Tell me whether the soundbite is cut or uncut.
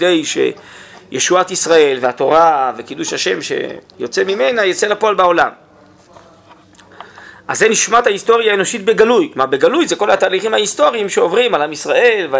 uncut